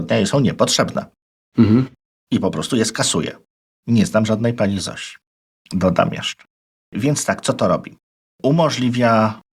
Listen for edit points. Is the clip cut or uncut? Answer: uncut